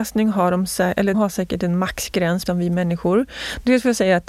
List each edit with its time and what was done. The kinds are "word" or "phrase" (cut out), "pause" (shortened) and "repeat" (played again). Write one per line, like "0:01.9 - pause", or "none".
0:01.1 - word
0:02.5 - word